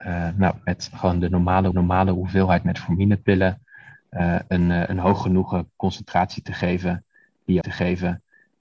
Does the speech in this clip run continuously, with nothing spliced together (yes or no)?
no